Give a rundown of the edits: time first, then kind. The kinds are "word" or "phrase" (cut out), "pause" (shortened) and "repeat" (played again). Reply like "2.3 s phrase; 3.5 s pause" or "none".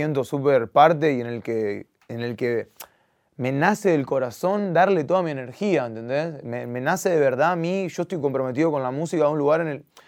none